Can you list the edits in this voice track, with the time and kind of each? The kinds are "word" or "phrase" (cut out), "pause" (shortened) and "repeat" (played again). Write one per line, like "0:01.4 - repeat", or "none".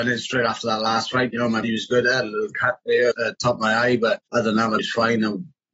0:01.6 - word
0:03.1 - word
0:04.3 - pause
0:04.8 - word